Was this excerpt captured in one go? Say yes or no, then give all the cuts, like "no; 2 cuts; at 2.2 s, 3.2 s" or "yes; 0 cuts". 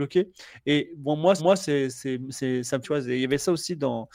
no; 2 cuts; at 1.4 s, 2.8 s